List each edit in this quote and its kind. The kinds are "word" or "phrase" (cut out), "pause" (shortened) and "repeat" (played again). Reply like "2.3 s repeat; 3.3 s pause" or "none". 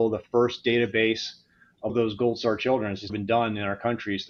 1.9 s word; 3.1 s word